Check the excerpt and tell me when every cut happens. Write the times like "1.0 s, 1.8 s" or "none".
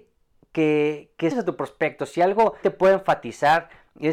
1.3 s, 2.6 s